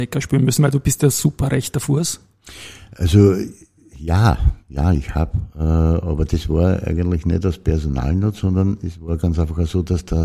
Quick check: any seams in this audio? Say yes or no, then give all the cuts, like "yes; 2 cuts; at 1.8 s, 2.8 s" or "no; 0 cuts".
no; 0 cuts